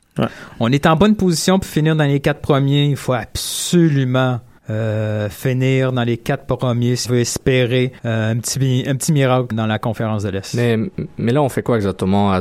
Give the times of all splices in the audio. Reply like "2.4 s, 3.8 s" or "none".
4.6 s, 7.0 s, 8.0 s, 9.5 s